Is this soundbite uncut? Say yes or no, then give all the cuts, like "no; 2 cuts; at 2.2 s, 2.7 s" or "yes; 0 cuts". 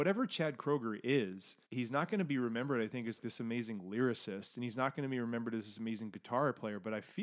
no; 2 cuts; at 1.6 s, 3.2 s